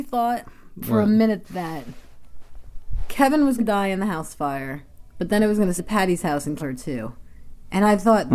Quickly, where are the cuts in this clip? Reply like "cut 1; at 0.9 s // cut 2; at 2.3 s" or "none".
cut 1; at 1.4 s // cut 2; at 3.6 s // cut 3; at 5.8 s // cut 4; at 6.6 s

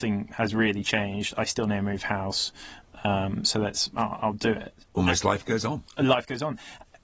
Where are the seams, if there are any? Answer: none

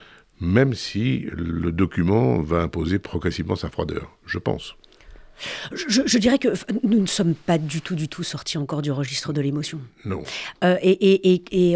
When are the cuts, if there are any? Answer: none

